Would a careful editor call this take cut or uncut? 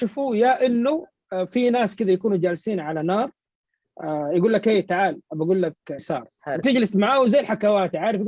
cut